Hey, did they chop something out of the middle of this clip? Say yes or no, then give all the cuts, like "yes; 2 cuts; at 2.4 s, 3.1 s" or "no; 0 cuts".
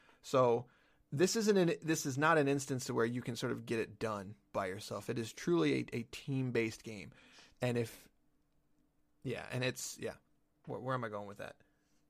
no; 0 cuts